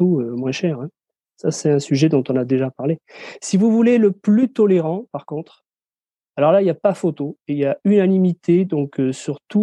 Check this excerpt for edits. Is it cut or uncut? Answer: uncut